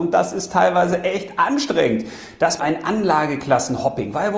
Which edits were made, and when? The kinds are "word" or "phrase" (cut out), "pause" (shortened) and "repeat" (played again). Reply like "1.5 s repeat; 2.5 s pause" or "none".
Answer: 2.6 s word